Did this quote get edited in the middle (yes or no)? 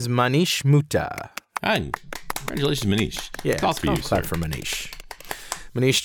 yes